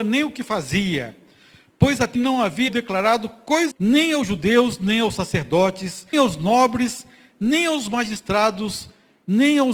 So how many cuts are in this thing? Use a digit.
4